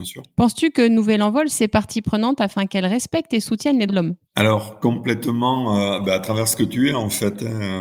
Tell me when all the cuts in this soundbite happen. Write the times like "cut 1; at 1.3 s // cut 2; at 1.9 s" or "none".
cut 1; at 1.5 s // cut 2; at 3.9 s // cut 3; at 4.2 s